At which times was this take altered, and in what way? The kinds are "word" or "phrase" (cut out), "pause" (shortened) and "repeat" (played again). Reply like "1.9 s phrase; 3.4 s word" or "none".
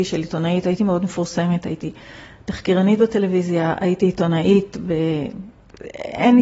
none